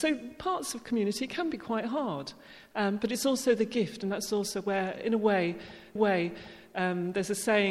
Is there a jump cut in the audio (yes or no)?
yes